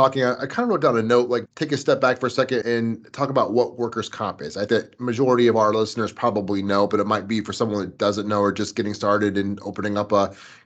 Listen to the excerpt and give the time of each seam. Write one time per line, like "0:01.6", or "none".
0:01.5
0:02.6
0:04.7

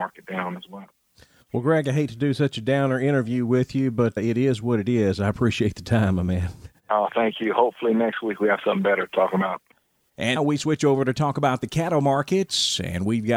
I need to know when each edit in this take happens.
0:04.2
0:10.4

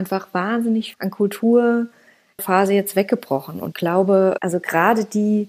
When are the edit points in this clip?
0:00.9
0:02.4
0:03.7
0:04.4

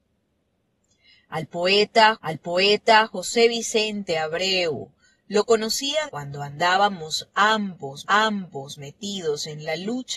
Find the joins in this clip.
0:02.2
0:06.1
0:08.0

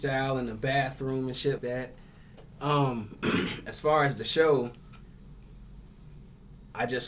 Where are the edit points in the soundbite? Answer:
0:01.6

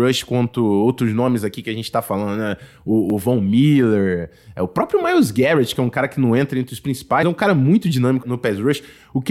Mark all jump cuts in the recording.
0:07.2
0:08.2

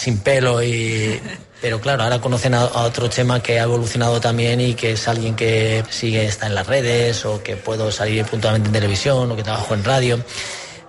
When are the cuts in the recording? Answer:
0:05.9

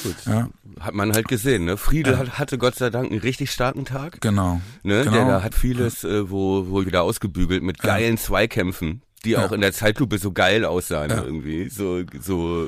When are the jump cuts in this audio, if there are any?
0:05.5
0:06.8

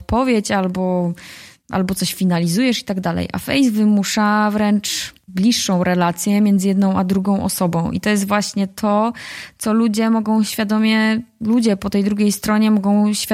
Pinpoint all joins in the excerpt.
none

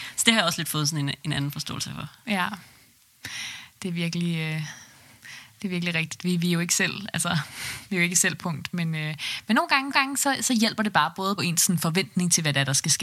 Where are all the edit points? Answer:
0:08.4
0:09.9
0:11.4

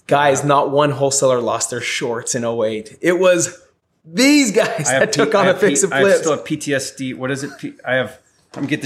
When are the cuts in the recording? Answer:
none

